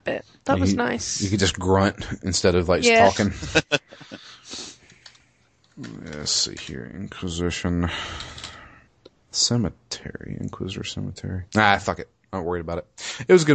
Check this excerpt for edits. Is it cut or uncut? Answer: cut